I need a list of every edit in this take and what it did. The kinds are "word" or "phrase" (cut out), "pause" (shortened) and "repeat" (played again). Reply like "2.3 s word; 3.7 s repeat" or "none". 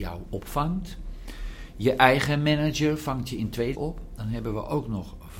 3.7 s word